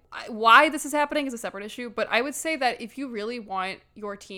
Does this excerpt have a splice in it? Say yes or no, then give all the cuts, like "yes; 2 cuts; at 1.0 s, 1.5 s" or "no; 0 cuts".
no; 0 cuts